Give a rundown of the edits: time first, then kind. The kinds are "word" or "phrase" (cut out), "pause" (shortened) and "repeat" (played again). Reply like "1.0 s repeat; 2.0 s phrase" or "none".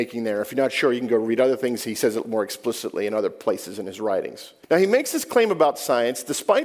4.6 s pause